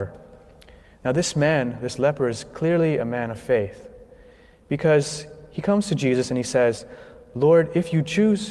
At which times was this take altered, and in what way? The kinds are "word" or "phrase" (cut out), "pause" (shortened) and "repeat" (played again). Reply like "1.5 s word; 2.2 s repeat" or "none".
none